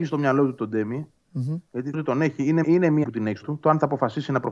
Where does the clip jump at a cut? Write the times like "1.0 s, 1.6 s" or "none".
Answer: 1.9 s, 2.6 s, 3.0 s, 3.4 s